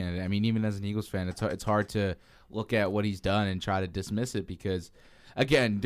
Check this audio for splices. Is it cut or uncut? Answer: uncut